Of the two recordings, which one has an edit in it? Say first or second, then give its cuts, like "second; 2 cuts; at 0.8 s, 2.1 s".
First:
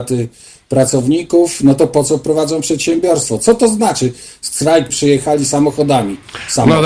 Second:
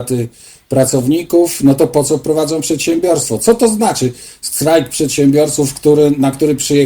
first; 1 cut; at 4.9 s